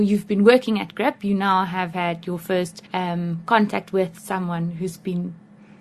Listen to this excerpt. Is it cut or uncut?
cut